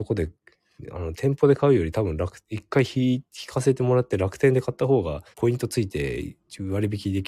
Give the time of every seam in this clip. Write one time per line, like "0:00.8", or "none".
0:02.4
0:05.3